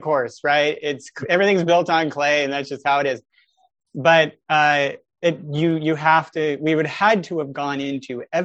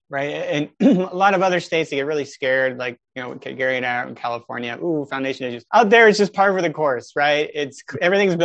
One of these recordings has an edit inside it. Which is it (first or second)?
second